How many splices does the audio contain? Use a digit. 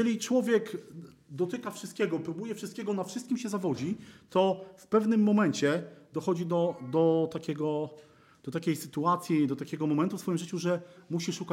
0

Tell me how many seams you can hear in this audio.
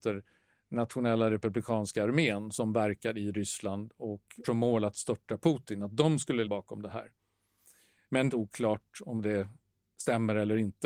3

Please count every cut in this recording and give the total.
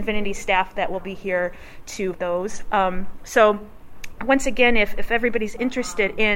1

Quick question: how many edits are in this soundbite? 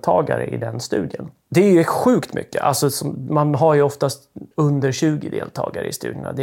1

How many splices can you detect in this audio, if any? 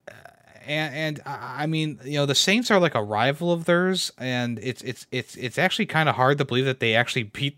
0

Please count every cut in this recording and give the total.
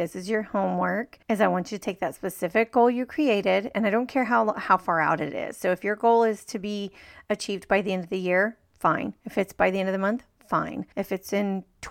2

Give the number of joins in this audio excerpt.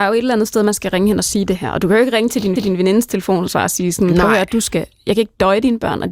1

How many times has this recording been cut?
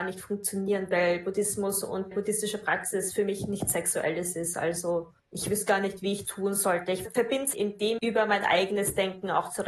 6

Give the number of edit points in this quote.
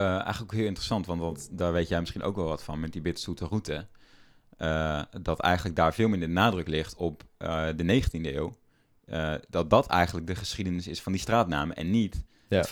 0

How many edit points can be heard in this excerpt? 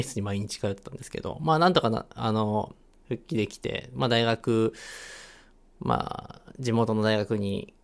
0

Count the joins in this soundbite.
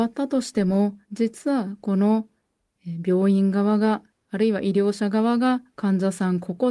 1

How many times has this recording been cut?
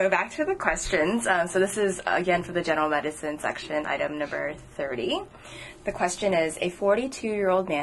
0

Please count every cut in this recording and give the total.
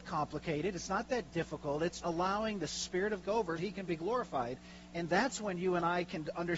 3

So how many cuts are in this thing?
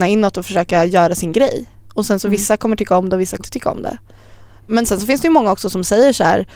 1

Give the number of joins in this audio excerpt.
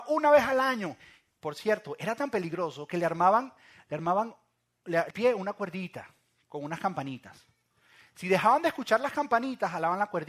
1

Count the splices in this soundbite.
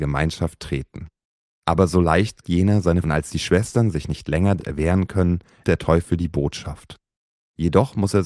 4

